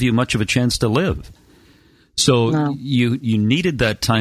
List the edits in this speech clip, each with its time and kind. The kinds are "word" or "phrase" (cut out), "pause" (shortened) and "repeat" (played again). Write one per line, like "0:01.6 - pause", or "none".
none